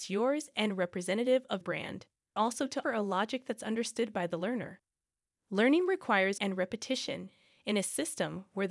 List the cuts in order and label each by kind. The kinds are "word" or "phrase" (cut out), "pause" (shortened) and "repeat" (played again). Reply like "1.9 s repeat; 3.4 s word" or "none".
1.6 s word; 2.4 s word; 2.8 s word; 6.4 s word